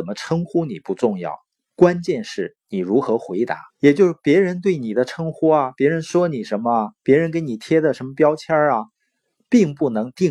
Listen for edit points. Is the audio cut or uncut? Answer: cut